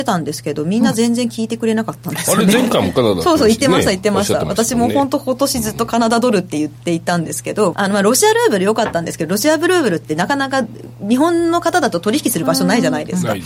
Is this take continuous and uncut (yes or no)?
no